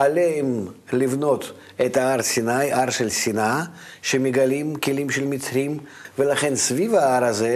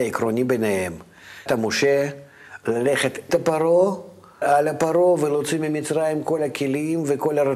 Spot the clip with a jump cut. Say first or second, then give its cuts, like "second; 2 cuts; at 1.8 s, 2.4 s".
second; 3 cuts; at 1.5 s, 3.3 s, 4.4 s